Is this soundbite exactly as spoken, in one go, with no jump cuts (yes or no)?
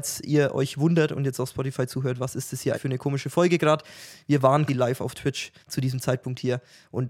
no